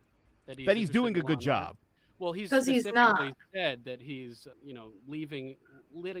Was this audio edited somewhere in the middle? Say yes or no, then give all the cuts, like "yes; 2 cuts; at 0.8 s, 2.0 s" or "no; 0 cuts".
yes; 1 cut; at 4.5 s